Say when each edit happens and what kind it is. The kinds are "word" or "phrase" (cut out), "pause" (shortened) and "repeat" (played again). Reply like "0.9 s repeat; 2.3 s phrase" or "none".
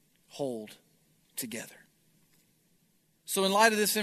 2.5 s pause